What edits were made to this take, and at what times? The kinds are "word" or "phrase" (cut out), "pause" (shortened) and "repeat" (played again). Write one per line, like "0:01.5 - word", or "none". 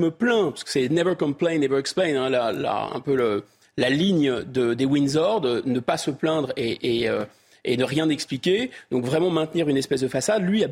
none